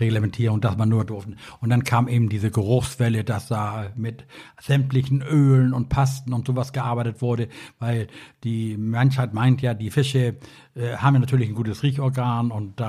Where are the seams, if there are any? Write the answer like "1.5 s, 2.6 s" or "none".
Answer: 1.1 s